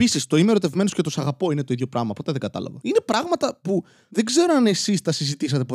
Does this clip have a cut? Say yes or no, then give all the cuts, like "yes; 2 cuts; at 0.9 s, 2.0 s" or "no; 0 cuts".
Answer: no; 0 cuts